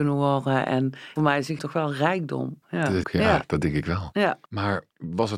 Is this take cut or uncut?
cut